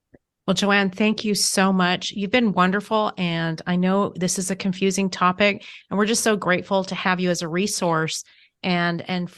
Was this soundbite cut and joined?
no; 0 cuts

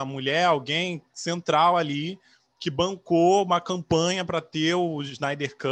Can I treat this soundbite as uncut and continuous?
yes; 0 cuts

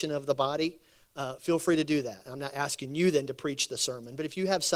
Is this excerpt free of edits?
yes; 0 cuts

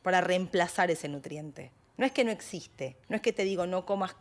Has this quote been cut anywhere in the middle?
yes; 1 cut; at 3.0 s

